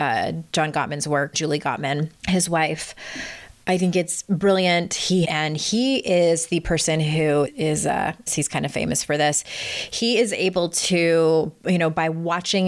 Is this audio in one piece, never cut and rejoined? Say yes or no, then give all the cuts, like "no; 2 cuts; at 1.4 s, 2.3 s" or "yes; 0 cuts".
no; 5 cuts; at 1.3 s, 2.2 s, 5.2 s, 7.5 s, 8.3 s